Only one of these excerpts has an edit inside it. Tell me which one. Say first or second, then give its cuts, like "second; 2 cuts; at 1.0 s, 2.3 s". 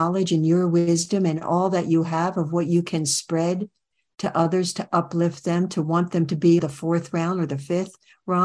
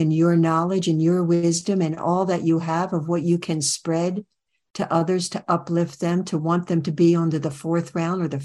first; 1 cut; at 6.6 s